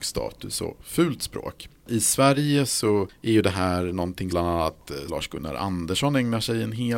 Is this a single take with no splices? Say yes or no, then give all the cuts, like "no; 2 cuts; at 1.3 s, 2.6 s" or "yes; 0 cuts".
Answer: no; 2 cuts; at 4.3 s, 5.1 s